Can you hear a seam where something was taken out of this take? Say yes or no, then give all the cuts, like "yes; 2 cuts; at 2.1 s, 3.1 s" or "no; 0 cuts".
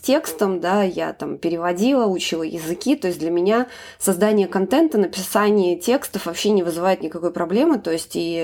no; 0 cuts